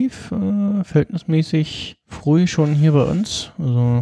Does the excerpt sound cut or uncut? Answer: cut